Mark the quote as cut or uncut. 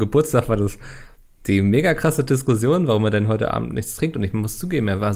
uncut